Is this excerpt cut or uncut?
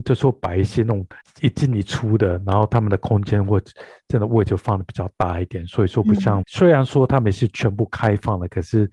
cut